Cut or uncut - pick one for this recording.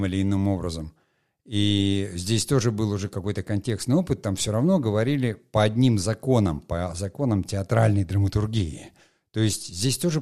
uncut